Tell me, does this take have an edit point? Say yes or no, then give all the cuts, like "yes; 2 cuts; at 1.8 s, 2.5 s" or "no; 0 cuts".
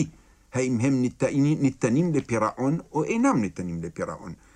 no; 0 cuts